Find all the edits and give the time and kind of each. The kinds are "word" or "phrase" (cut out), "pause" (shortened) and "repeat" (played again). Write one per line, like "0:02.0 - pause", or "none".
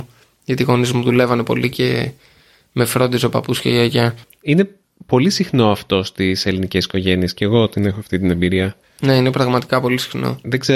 0:08.8 - pause